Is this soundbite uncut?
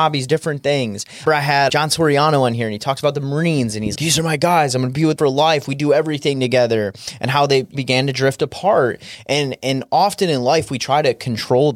no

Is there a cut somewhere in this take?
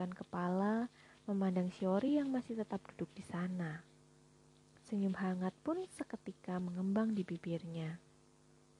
no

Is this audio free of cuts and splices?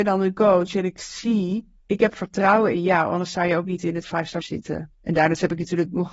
no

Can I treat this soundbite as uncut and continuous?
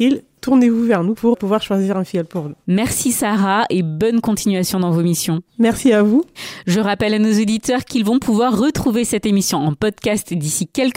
no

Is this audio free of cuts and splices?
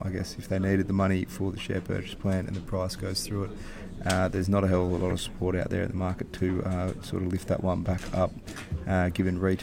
yes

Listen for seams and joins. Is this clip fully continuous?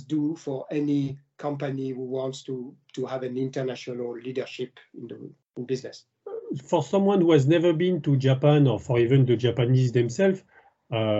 yes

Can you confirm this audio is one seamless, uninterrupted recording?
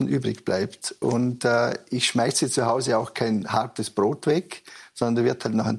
yes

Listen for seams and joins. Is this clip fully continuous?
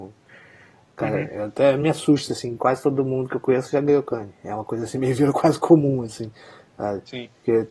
yes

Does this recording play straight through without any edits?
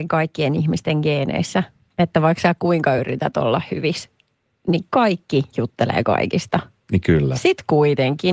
yes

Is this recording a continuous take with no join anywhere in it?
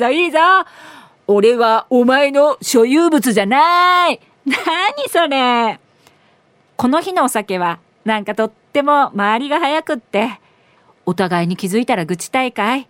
yes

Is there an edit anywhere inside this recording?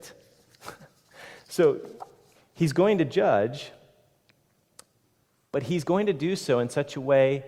no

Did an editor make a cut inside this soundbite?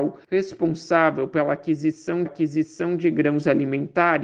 yes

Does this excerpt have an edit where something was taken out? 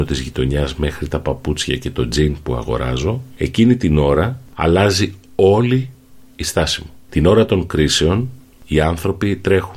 no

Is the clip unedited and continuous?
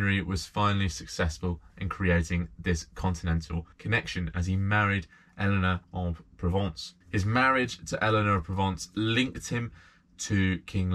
no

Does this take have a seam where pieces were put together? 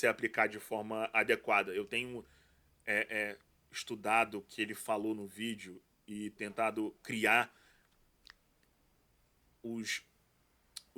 no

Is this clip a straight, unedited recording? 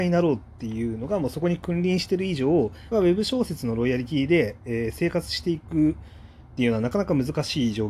no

